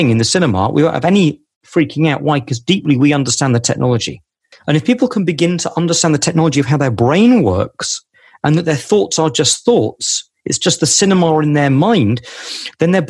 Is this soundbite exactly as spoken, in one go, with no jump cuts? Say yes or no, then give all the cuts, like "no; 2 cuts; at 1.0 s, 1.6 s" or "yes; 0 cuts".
yes; 0 cuts